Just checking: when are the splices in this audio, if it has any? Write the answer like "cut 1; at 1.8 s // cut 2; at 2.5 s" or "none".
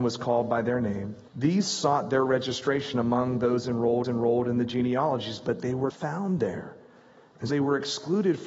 cut 1; at 1.3 s // cut 2; at 4.0 s // cut 3; at 5.9 s // cut 4; at 7.5 s